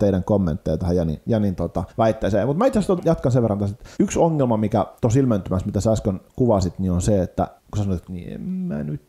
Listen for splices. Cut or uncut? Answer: cut